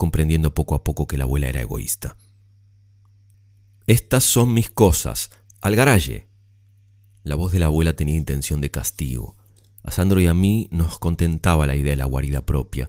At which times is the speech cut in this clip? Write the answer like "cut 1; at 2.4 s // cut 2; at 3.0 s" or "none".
none